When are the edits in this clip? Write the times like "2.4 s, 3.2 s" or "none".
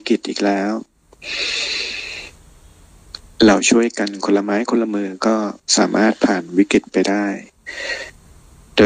none

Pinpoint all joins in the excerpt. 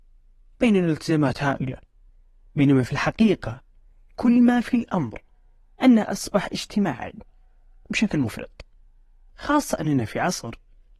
none

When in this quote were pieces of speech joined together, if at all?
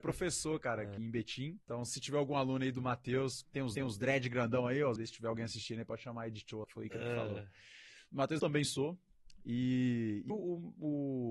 1.0 s, 1.6 s, 3.8 s, 5.0 s, 6.6 s, 8.4 s, 10.3 s

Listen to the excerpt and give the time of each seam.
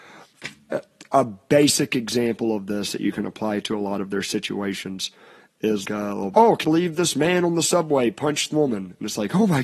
5.8 s, 6.3 s, 6.6 s, 8.5 s

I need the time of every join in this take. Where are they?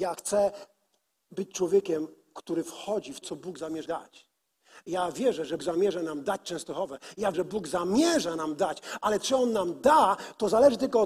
3.2 s, 3.9 s, 5.6 s, 7.3 s

